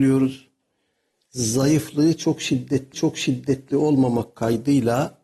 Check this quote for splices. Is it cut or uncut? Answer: cut